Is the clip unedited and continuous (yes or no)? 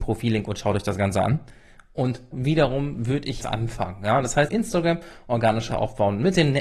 no